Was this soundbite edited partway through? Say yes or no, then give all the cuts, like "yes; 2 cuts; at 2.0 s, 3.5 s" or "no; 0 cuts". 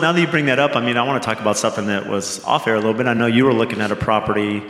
no; 0 cuts